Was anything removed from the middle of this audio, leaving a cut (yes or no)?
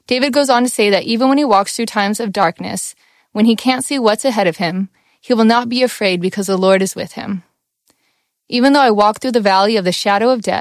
no